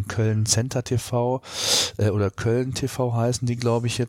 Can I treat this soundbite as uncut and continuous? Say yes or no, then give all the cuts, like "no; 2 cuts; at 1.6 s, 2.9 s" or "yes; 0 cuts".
yes; 0 cuts